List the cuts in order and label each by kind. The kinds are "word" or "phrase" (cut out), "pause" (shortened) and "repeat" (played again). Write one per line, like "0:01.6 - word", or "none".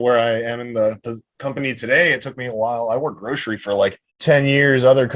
0:04.1 - pause